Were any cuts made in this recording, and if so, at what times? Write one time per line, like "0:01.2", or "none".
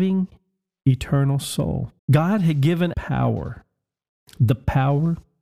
0:02.0
0:02.9